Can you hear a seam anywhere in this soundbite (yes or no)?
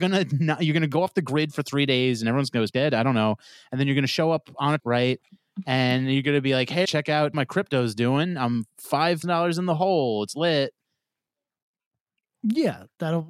yes